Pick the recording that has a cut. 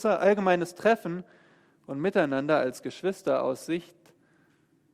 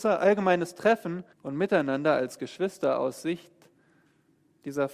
second; 1 cut; at 1.3 s

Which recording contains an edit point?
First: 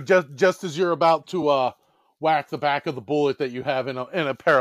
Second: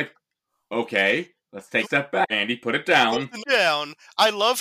second; 3 cuts; at 1.8 s, 2.3 s, 3.4 s

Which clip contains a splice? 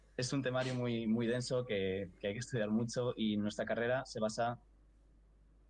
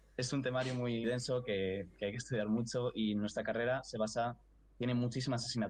second; 2 cuts; at 1.0 s, 4.6 s

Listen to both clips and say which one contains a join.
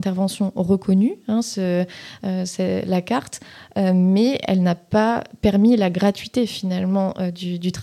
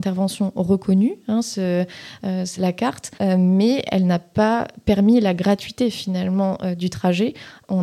second; 3 cuts; at 2.6 s, 3.2 s, 6.8 s

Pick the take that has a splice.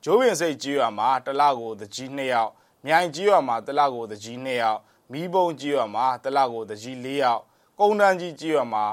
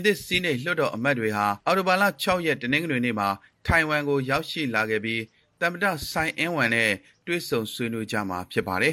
second; 1 cut; at 1.6 s

